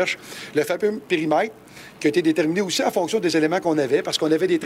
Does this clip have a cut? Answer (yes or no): no